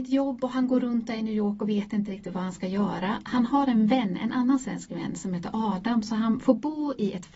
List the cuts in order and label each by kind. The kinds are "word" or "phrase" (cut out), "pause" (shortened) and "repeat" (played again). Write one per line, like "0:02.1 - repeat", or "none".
none